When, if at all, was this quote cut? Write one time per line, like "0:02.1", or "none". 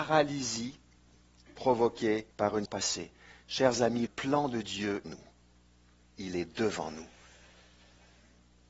0:02.3
0:02.7
0:04.1
0:05.0